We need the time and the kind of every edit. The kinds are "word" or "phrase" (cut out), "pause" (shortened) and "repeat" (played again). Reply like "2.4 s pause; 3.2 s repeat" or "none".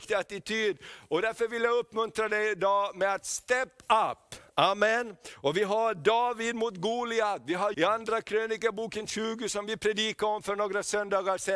7.7 s word